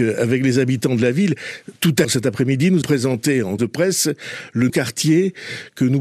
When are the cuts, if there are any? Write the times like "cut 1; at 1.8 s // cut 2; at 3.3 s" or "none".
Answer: cut 1; at 2.0 s // cut 2; at 2.8 s // cut 3; at 3.6 s // cut 4; at 4.7 s